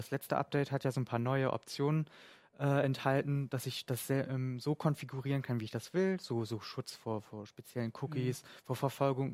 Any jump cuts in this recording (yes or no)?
no